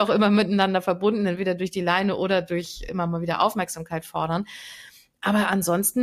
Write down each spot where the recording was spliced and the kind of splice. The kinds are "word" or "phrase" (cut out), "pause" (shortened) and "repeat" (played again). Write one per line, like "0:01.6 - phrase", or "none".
0:02.9 - word